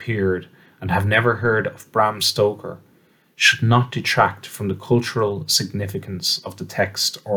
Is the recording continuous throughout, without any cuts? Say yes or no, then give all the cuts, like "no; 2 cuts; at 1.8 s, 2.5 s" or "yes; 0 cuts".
yes; 0 cuts